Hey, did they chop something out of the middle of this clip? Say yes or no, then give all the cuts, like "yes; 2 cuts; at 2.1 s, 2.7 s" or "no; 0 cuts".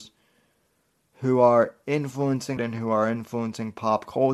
yes; 1 cut; at 2.6 s